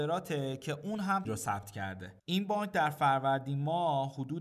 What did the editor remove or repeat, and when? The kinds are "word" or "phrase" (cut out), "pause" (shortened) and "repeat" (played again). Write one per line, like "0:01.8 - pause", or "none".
0:01.2 - phrase
0:02.2 - pause